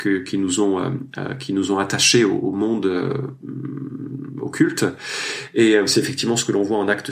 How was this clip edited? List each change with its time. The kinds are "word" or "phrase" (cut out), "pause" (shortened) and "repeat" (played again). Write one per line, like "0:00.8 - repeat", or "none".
none